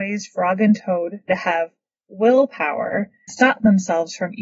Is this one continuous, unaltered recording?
no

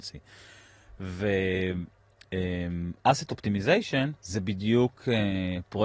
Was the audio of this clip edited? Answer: yes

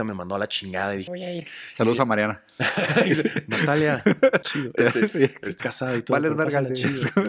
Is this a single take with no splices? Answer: no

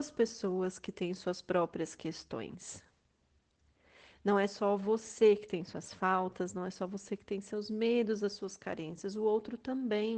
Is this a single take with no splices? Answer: yes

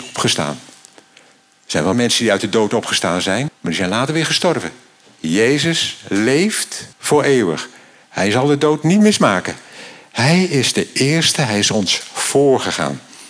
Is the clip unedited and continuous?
no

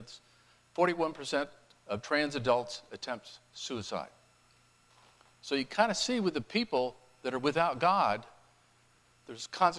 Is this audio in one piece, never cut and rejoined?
yes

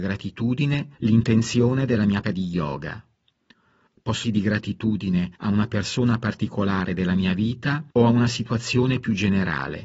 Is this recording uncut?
no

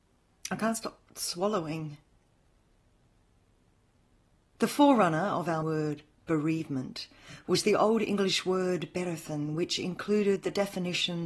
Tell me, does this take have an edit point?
yes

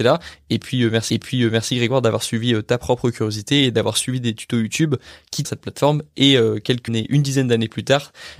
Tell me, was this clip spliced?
yes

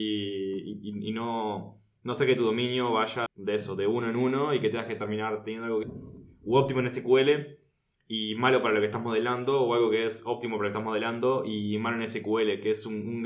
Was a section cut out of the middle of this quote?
yes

